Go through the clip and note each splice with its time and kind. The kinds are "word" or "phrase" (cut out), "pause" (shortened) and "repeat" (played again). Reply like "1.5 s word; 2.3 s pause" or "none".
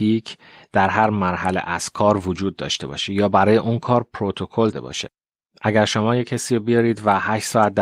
4.7 s phrase